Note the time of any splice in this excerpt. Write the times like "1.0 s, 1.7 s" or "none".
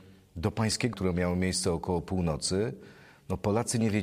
0.9 s